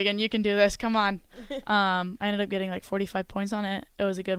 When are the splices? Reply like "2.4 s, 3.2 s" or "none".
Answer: none